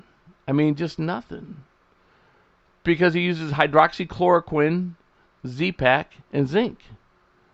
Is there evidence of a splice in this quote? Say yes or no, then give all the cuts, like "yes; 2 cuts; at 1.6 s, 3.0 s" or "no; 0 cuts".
yes; 1 cut; at 6.2 s